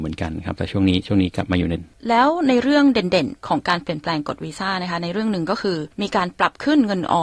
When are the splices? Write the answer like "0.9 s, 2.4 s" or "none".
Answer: 1.8 s

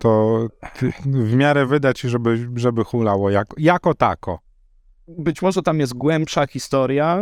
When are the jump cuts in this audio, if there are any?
none

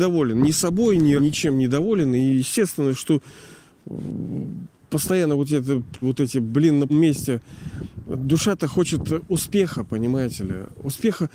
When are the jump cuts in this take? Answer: 1.2 s, 6.0 s, 6.9 s

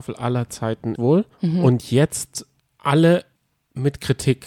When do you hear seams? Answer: 1.0 s, 1.3 s, 2.6 s, 3.4 s

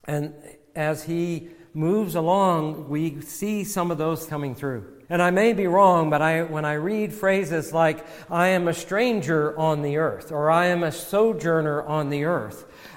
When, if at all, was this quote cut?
4.3 s, 5.0 s

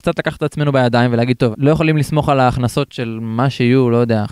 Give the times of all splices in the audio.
1.5 s

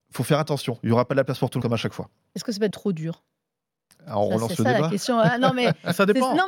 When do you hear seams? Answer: 1.6 s, 2.7 s

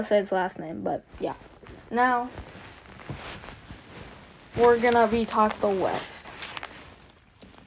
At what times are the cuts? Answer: 1.8 s, 5.5 s

